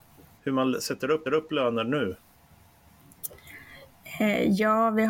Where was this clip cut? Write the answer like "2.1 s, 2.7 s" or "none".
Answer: 1.3 s